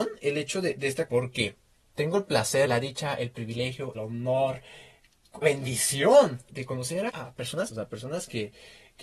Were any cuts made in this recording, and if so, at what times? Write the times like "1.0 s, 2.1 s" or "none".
1.1 s, 2.6 s, 3.9 s, 5.4 s, 6.5 s, 7.1 s, 7.7 s

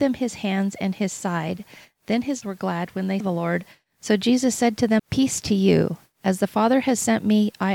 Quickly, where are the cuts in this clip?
2.4 s, 3.2 s, 5.0 s

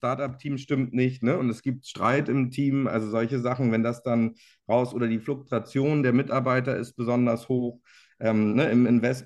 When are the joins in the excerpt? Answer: none

